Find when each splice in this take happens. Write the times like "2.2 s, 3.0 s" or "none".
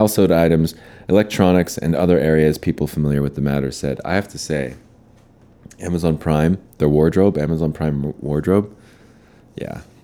none